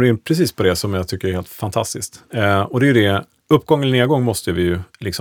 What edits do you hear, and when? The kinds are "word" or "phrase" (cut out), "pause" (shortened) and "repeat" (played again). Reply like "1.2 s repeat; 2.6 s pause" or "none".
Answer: none